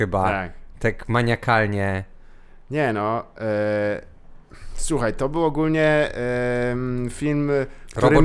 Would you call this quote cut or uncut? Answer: uncut